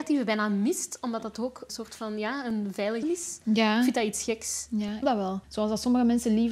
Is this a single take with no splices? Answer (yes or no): no